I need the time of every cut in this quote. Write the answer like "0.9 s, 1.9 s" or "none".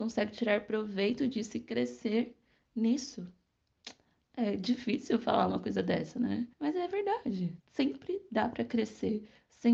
6.5 s, 7.6 s